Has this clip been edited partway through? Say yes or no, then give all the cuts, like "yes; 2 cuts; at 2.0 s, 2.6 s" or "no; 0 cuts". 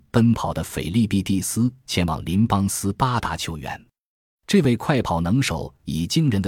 no; 0 cuts